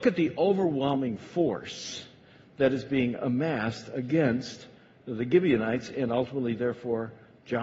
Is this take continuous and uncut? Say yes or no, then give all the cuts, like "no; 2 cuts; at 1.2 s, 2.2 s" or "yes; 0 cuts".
yes; 0 cuts